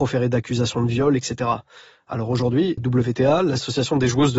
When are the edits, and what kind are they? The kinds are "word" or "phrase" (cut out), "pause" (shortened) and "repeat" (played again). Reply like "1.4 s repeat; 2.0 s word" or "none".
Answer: 2.8 s word